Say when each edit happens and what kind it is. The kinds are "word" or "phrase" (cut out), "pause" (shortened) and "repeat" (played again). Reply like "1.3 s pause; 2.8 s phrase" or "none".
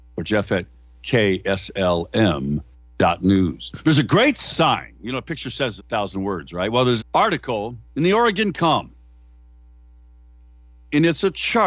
2.7 s pause; 5.8 s word; 7.0 s word; 7.9 s pause; 8.5 s phrase